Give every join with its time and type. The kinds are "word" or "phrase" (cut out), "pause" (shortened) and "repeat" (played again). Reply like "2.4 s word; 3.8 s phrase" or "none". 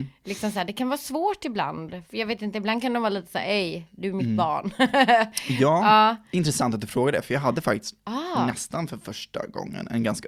2.1 s pause